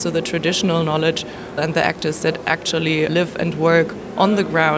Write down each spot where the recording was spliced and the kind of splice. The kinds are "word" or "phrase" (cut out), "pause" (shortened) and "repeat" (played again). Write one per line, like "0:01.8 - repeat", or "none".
0:01.6 - phrase
0:03.1 - word